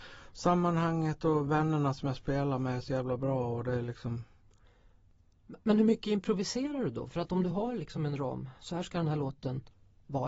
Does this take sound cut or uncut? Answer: uncut